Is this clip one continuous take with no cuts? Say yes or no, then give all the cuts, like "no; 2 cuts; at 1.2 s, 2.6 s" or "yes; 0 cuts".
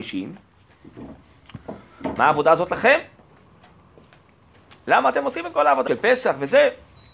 no; 1 cut; at 5.9 s